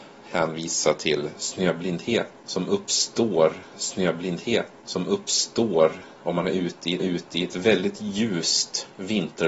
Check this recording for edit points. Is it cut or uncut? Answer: cut